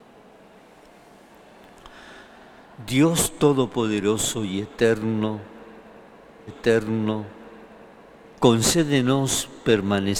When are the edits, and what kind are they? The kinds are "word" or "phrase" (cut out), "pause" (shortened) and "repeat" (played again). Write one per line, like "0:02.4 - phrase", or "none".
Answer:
0:06.5 - repeat

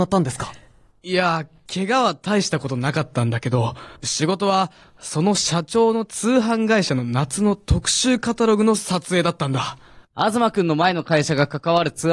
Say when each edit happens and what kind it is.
0:04.0 - pause
0:10.0 - pause

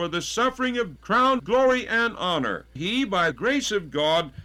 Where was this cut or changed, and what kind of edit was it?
0:01.0 - word
0:01.4 - word
0:02.8 - word
0:03.3 - word

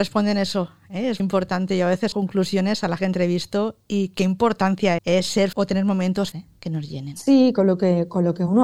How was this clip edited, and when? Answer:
0:01.2 - word
0:02.1 - word
0:03.0 - word
0:05.0 - word
0:05.5 - word
0:06.3 - word

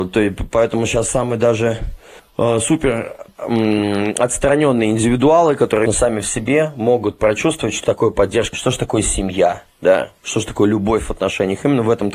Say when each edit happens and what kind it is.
0:02.2 - pause
0:05.9 - word
0:07.8 - word
0:08.5 - word

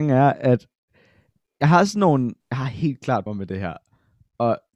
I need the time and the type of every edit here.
0:02.4 - pause
0:03.3 - word

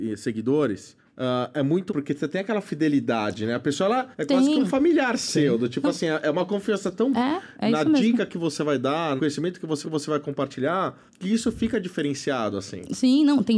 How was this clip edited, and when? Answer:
0:01.0 - pause
0:01.9 - word
0:04.1 - pause
0:07.1 - word
0:09.2 - word
0:09.8 - repeat
0:11.1 - pause

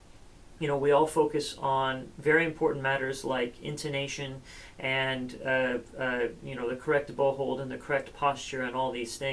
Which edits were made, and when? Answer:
none

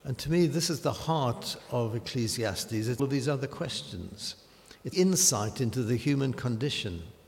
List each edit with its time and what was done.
0:03.0 - phrase
0:04.9 - phrase

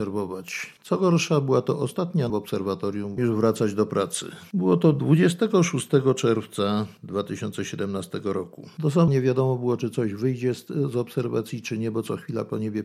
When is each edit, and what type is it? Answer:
0:02.3 - phrase
0:03.2 - phrase
0:09.1 - phrase

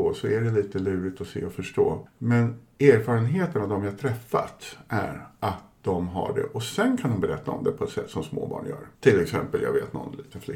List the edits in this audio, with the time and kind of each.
0:02.7 - pause
0:08.9 - pause

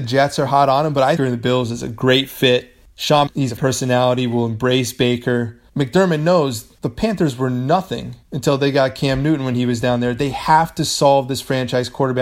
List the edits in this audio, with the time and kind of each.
0:01.2 - phrase
0:03.3 - phrase
0:03.6 - word
0:05.7 - pause
0:06.8 - pause
0:08.2 - pause

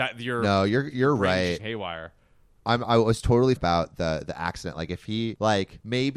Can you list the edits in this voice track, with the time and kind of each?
0:01.6 - word
0:02.8 - word
0:03.6 - word

